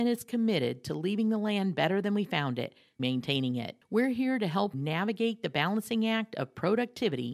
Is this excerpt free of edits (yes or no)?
no